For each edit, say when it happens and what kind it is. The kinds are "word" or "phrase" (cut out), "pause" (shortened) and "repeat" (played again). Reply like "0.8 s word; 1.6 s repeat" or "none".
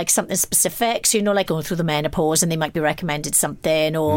1.5 s phrase